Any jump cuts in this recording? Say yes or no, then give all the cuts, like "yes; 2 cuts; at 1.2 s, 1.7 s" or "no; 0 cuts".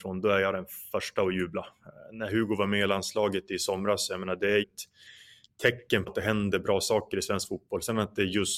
yes; 2 cuts; at 4.6 s, 6.1 s